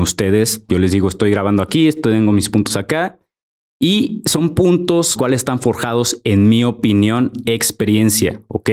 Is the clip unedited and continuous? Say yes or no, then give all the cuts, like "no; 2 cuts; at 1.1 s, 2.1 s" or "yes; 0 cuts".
no; 2 cuts; at 5.1 s, 7.4 s